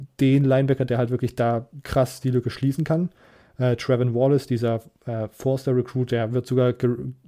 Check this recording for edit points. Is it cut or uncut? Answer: uncut